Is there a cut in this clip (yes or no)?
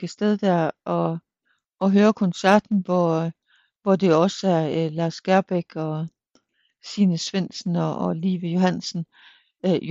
no